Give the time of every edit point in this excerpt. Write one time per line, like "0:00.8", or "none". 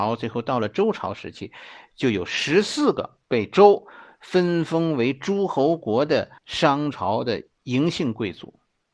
0:03.2
0:06.4